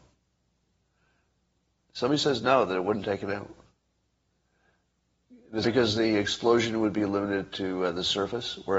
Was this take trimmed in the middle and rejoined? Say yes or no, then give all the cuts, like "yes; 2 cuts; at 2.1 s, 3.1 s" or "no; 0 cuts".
yes; 1 cut; at 5.6 s